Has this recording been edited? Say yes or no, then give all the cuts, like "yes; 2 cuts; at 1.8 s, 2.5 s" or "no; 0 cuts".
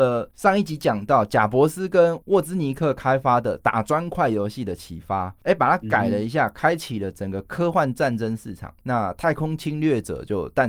no; 0 cuts